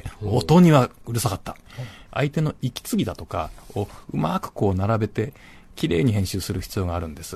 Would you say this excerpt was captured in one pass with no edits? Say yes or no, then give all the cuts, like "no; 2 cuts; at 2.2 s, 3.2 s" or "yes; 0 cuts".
yes; 0 cuts